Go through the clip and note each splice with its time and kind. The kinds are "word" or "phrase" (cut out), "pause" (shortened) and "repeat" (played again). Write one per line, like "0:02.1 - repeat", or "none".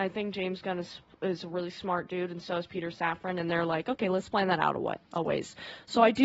0:05.0 - pause